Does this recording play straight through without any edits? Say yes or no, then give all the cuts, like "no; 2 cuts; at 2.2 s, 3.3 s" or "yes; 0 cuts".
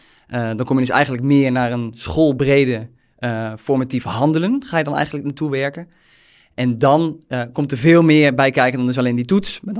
yes; 0 cuts